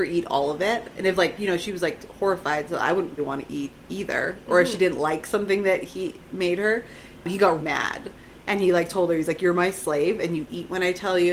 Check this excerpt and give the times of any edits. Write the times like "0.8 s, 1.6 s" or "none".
3.2 s, 7.6 s